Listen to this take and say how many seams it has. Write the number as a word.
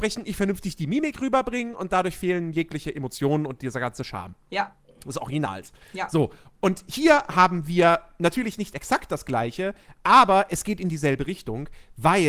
zero